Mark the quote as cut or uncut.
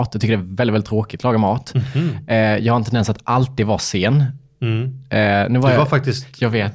uncut